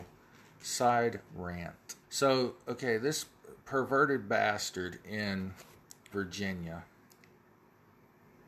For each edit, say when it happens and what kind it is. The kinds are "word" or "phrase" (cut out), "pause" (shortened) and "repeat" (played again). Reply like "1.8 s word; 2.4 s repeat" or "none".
2.0 s pause; 3.6 s pause; 6.1 s phrase